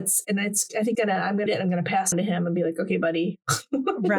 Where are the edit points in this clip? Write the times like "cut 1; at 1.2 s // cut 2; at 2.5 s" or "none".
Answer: cut 1; at 0.9 s // cut 2; at 1.5 s // cut 3; at 2.1 s